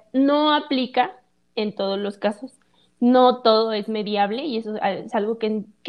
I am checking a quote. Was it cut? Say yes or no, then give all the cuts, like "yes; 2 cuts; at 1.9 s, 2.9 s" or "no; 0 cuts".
no; 0 cuts